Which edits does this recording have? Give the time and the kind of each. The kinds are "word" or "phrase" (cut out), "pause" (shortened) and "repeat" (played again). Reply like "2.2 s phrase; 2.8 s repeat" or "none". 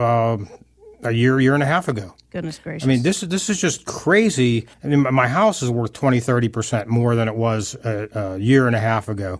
4.7 s pause